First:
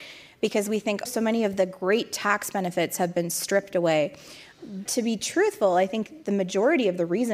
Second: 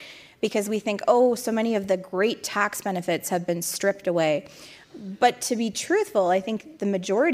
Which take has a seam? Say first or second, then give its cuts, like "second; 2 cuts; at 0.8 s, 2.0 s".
first; 2 cuts; at 1.1 s, 4.9 s